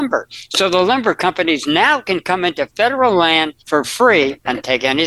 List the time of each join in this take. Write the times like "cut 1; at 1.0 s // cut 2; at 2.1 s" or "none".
cut 1; at 3.6 s